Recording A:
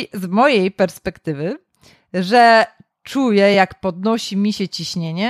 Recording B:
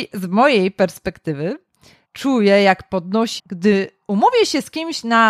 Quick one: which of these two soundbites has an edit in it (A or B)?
B